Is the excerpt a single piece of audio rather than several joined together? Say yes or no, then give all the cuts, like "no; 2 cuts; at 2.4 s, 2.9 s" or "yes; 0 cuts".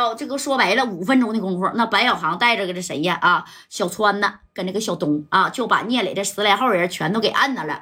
yes; 0 cuts